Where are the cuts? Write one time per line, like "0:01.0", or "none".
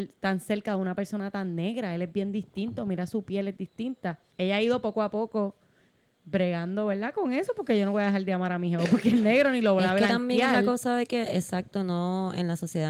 0:04.3